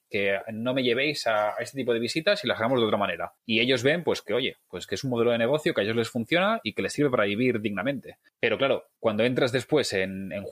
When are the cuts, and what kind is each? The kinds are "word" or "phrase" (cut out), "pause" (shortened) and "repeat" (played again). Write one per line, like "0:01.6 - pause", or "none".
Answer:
0:03.4 - pause
0:09.0 - pause